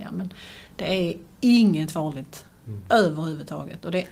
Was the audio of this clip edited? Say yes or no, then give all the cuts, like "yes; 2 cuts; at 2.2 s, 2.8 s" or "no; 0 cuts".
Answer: no; 0 cuts